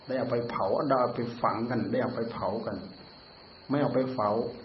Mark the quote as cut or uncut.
uncut